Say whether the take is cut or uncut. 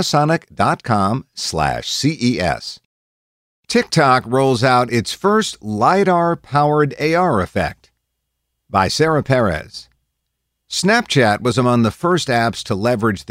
uncut